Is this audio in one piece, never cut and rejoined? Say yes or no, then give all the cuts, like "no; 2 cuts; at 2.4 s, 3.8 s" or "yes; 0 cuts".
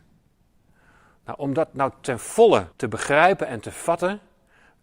no; 1 cut; at 2.7 s